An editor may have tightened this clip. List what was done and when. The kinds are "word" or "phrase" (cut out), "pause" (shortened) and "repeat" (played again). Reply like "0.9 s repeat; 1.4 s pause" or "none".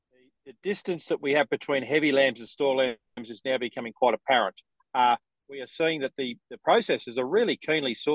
none